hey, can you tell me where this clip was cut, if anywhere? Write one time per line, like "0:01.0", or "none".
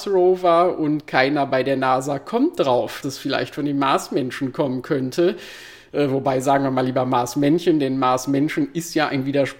0:03.0